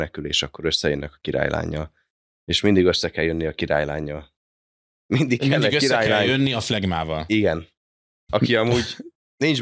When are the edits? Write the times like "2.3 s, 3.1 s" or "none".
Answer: none